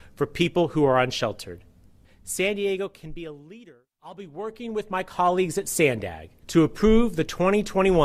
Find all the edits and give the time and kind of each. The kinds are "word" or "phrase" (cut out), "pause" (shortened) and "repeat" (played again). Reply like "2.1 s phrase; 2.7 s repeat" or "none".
2.0 s pause; 6.4 s pause